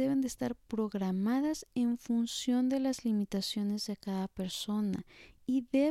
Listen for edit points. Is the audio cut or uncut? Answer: uncut